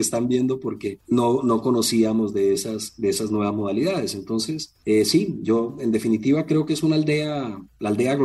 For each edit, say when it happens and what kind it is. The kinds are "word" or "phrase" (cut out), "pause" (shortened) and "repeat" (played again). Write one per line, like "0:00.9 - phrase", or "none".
none